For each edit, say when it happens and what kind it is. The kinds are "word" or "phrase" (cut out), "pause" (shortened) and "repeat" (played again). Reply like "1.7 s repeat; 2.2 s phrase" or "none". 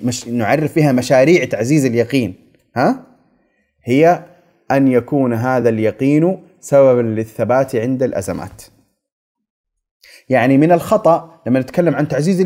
none